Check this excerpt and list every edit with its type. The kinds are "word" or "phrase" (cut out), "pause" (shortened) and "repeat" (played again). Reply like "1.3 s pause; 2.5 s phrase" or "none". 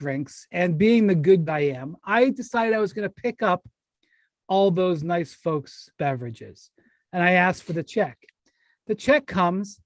1.5 s phrase; 5.9 s pause